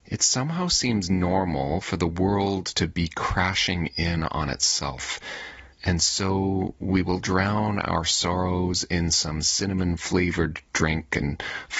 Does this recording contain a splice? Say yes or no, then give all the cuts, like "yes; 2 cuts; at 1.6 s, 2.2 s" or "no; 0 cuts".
yes; 1 cut; at 5.7 s